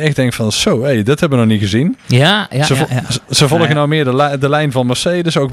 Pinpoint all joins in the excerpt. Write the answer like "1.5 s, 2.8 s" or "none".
2.0 s, 3.2 s